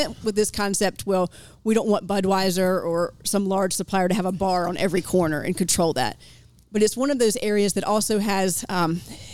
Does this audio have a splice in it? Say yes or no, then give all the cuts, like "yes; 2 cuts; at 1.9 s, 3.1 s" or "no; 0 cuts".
no; 0 cuts